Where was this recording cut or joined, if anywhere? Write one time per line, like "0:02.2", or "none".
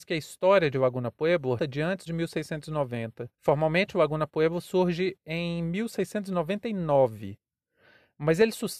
0:01.6
0:02.1
0:03.3